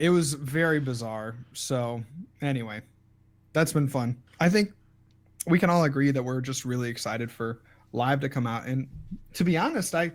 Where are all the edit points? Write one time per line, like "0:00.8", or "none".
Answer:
0:04.3